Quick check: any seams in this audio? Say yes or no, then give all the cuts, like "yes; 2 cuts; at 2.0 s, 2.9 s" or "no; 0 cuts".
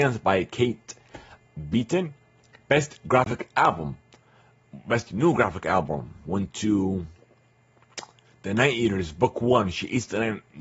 no; 0 cuts